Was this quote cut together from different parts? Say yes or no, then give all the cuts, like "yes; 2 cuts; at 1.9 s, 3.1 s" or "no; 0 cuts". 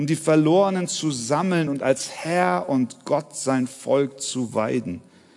no; 0 cuts